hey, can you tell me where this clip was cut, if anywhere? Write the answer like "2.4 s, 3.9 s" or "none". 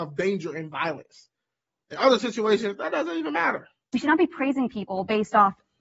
none

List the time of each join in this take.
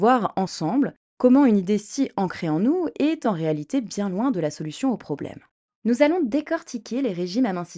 none

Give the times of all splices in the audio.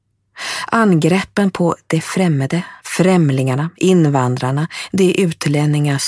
2.8 s

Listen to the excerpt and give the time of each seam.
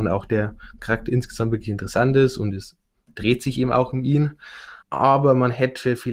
4.8 s

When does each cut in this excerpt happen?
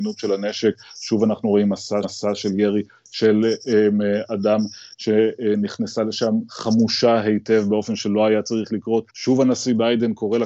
2.0 s, 9.1 s

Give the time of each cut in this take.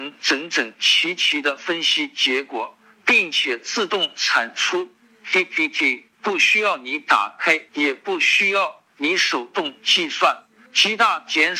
6.1 s, 7.7 s

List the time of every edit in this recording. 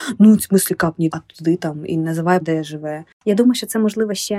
1.1 s, 2.4 s

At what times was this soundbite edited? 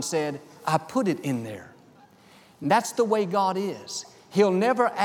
none

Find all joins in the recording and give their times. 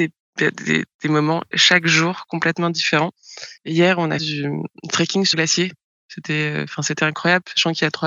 1.5 s, 4.2 s, 5.3 s

